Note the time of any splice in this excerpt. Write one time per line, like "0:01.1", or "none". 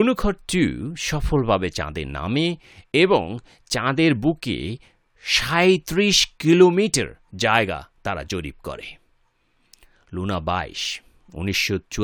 none